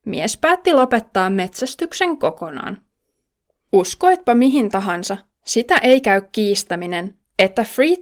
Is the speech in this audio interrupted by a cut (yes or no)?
no